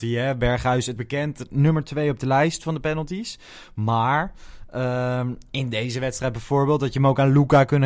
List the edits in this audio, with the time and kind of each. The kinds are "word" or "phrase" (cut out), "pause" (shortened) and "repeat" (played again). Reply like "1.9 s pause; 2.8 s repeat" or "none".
1.0 s word